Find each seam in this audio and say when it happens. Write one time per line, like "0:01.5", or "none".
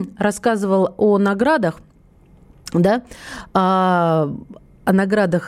none